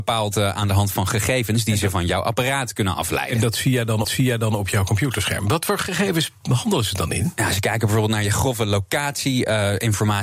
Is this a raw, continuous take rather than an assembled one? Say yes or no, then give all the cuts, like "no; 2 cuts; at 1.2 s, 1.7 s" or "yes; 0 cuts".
no; 1 cut; at 4.0 s